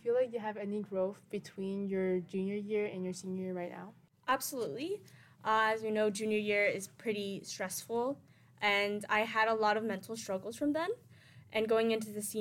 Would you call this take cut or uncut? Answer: uncut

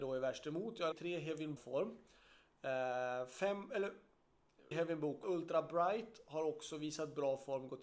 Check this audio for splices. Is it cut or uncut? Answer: cut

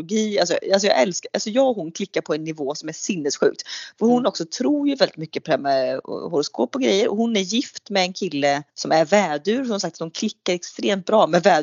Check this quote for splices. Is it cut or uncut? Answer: cut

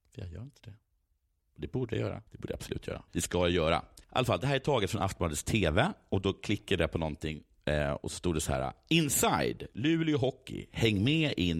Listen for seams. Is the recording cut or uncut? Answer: cut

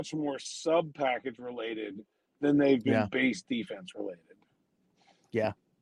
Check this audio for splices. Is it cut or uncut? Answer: uncut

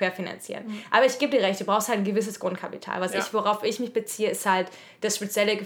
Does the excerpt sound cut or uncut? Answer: uncut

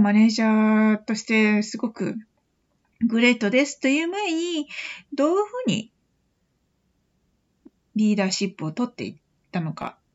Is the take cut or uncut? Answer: uncut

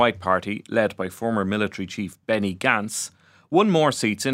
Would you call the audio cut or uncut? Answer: uncut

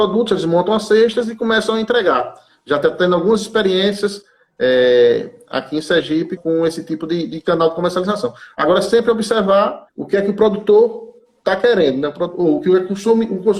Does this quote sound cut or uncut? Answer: cut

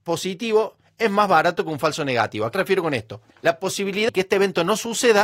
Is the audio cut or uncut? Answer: cut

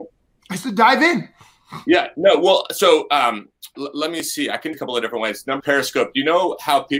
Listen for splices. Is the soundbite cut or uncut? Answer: cut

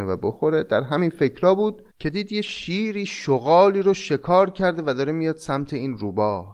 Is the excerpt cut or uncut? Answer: cut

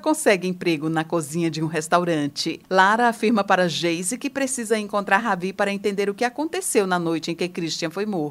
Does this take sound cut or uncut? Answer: uncut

